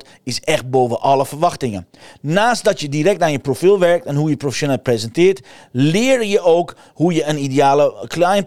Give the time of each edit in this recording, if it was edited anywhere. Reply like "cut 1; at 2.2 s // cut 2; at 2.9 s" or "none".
none